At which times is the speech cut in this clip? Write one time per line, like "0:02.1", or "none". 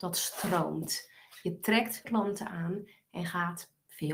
0:02.0